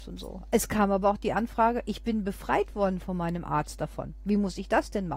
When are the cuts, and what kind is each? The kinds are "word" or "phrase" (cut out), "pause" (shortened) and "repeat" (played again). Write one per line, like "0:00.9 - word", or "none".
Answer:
none